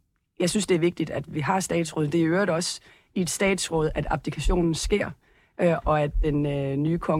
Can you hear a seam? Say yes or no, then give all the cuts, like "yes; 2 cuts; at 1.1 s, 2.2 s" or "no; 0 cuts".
no; 0 cuts